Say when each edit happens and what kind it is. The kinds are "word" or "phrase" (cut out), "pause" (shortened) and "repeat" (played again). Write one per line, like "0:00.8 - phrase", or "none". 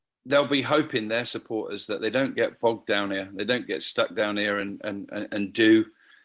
none